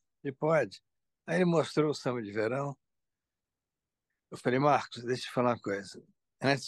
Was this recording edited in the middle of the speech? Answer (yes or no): no